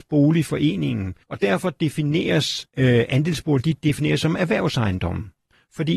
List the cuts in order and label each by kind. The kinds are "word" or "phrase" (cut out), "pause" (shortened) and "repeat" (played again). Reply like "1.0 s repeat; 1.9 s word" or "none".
1.2 s pause; 2.7 s pause